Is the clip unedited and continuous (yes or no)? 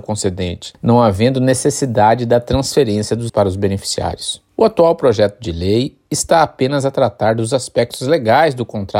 no